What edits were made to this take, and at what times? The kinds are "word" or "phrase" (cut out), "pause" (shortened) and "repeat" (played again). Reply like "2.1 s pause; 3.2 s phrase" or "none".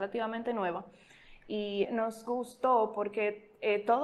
1.8 s word